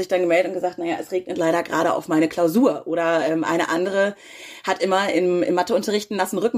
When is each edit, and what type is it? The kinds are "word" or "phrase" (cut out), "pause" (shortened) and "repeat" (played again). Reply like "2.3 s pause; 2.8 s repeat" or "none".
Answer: none